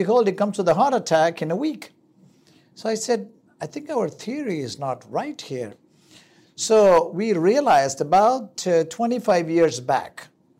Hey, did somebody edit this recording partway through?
no; 0 cuts

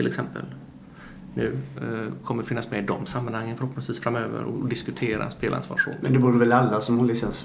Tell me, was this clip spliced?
no; 0 cuts

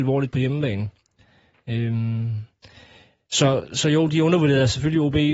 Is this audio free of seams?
yes; 0 cuts

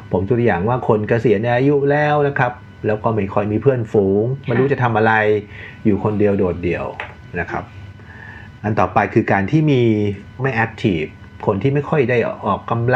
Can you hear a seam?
yes; 1 cut; at 10.4 s

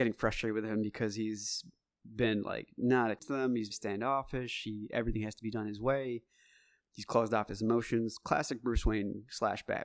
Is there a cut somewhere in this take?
yes; 2 cuts; at 3.2 s, 3.7 s

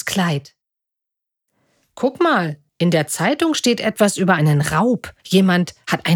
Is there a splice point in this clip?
yes; 2 cuts; at 2.7 s, 5.2 s

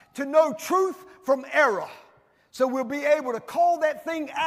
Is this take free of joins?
yes; 0 cuts

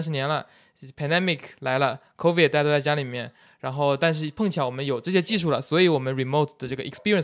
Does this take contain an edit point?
no; 0 cuts

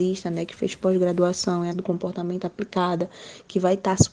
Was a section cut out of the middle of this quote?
yes; 1 cut; at 1.7 s

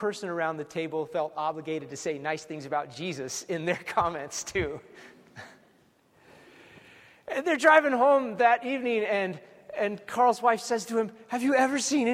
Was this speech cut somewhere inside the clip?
no; 0 cuts

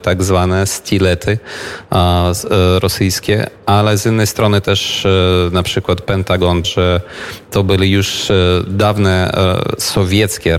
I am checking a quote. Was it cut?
yes; 1 cut; at 6.6 s

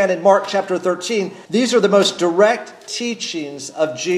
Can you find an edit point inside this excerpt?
yes; 1 cut; at 1.4 s

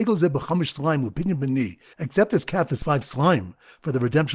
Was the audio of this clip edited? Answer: no; 0 cuts

